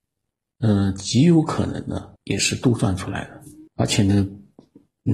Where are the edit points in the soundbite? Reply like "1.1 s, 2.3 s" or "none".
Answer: 2.2 s, 3.7 s